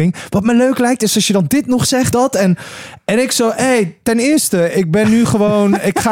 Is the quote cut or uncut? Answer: cut